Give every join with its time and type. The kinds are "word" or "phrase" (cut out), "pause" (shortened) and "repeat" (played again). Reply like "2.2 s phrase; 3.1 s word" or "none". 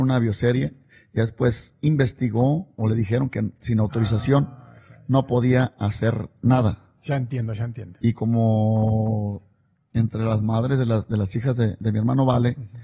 none